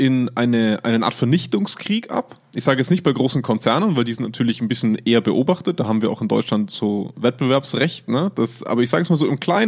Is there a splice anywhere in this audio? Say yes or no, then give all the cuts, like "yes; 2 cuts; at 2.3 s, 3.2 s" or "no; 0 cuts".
no; 0 cuts